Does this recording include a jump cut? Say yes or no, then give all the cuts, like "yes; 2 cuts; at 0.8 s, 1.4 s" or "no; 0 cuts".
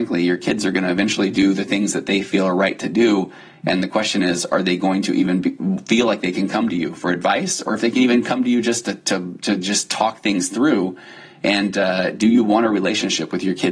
no; 0 cuts